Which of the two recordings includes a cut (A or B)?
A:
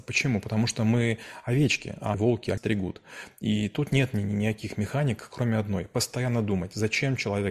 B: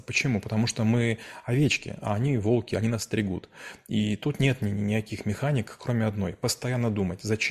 A